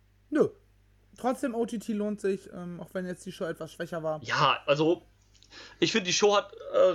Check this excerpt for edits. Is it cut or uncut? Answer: uncut